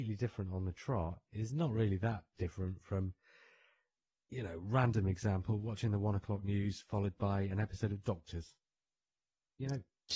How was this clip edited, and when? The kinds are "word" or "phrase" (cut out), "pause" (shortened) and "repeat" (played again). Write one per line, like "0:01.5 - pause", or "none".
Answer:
none